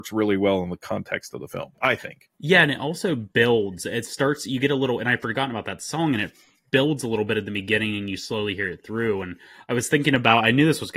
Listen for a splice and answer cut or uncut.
uncut